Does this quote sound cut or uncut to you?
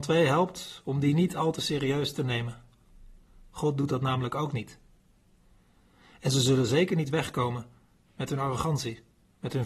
uncut